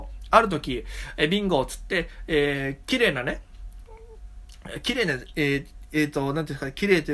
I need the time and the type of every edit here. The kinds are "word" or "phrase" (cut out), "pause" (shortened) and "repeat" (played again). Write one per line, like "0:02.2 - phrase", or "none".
none